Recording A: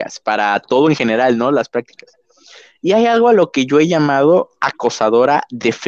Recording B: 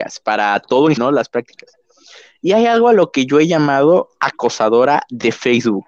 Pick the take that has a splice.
B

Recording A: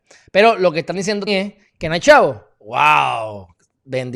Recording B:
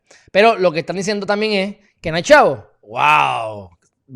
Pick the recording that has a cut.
A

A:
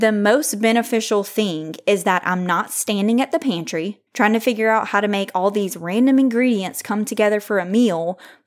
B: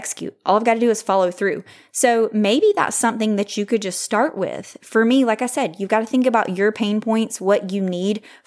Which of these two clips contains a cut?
A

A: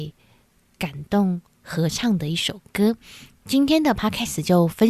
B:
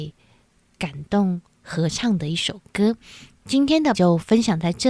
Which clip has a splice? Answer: B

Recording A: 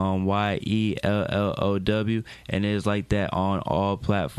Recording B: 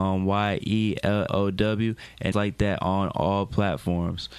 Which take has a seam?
B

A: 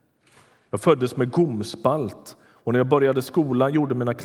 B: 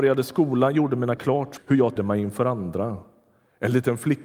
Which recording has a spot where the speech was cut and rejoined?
B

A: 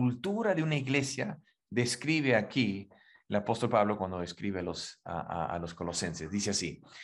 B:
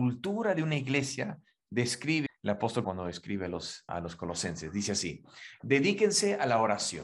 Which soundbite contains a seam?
B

